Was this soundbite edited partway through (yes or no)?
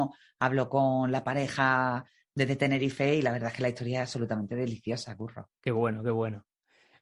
no